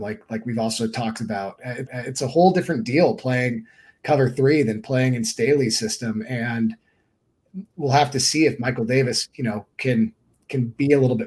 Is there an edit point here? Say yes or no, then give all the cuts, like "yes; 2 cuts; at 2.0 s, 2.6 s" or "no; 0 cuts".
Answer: yes; 1 cut; at 1.9 s